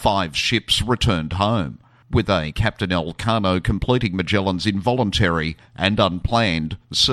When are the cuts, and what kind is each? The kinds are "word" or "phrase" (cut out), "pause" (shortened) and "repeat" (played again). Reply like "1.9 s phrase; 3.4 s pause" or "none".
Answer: none